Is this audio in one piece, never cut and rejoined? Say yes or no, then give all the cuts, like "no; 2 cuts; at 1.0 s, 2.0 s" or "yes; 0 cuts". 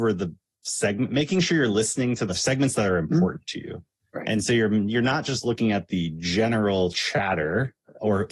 no; 2 cuts; at 2.3 s, 4.0 s